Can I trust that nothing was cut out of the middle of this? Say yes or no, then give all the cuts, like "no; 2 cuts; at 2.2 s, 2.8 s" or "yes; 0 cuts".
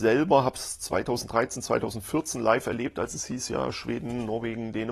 yes; 0 cuts